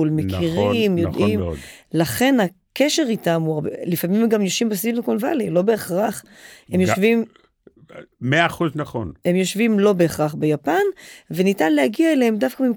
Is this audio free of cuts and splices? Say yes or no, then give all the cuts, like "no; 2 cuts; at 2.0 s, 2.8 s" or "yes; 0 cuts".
yes; 0 cuts